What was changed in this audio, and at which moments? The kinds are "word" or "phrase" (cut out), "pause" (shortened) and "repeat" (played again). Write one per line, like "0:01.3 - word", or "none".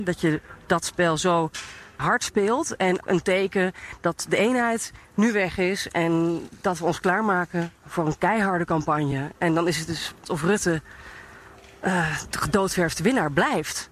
0:02.0 - word
0:03.0 - word
0:05.0 - pause
0:07.8 - pause
0:10.2 - word
0:12.3 - word